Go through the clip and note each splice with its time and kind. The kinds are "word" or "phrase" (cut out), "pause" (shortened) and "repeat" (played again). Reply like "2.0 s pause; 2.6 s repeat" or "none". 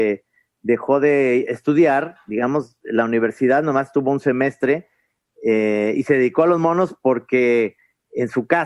none